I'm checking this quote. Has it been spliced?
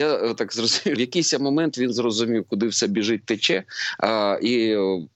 yes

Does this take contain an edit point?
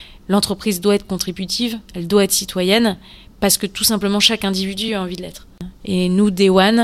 no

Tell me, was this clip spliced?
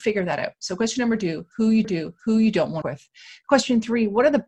yes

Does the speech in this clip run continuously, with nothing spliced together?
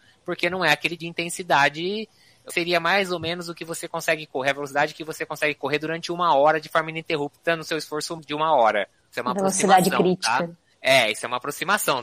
no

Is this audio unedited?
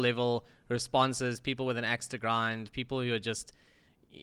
yes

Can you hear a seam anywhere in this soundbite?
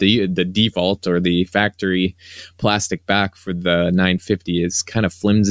no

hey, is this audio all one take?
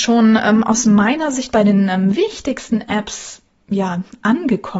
yes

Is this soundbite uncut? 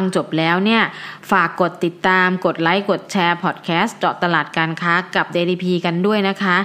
yes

